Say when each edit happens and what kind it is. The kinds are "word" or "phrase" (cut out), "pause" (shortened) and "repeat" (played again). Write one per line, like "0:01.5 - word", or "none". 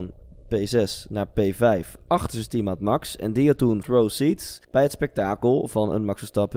0:03.8 - word
0:04.6 - pause